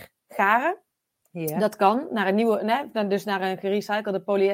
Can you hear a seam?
no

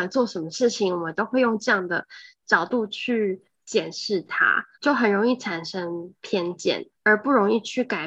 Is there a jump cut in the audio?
yes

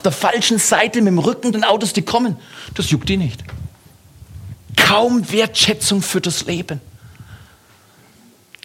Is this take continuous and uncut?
no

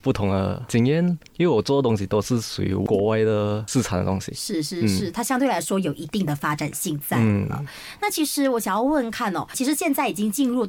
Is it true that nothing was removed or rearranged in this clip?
no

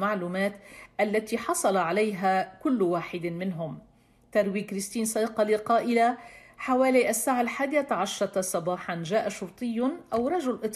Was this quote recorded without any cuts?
yes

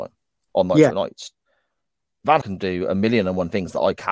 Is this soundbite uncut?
no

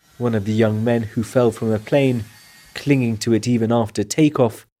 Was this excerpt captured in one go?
yes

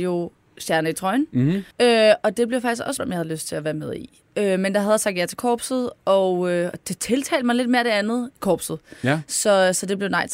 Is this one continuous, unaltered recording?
no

